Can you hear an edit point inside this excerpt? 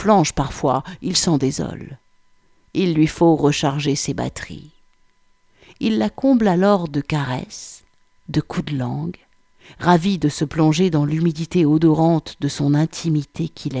no; 0 cuts

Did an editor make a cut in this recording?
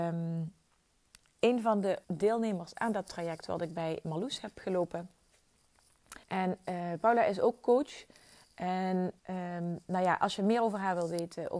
yes; 3 cuts; at 2.0 s, 6.2 s, 9.2 s

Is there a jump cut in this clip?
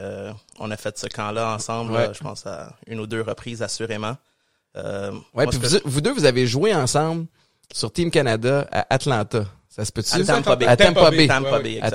no; 0 cuts

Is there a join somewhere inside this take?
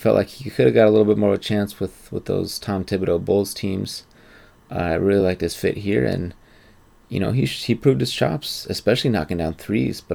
no; 0 cuts

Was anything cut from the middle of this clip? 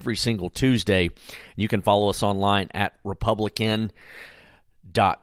no; 0 cuts

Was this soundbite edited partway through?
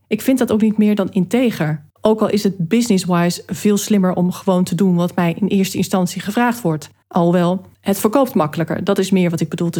yes; 3 cuts; at 1.9 s, 7.0 s, 7.7 s

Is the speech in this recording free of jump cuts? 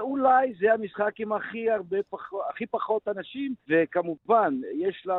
no; 1 cut; at 3.6 s

